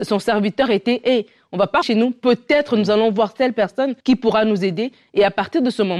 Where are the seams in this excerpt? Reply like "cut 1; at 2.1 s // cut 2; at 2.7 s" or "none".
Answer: cut 1; at 1.8 s // cut 2; at 4.0 s